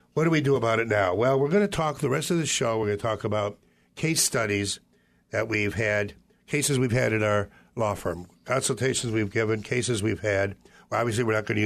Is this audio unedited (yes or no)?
yes